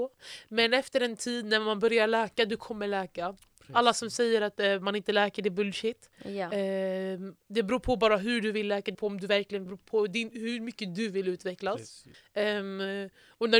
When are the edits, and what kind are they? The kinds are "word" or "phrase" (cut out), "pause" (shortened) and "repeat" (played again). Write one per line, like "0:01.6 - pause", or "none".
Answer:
0:06.1 - pause
0:08.9 - word
0:09.7 - phrase
0:12.1 - pause